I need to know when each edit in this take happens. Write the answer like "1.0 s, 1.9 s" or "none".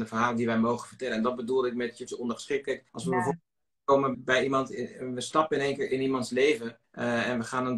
2.1 s, 2.9 s, 4.1 s, 6.8 s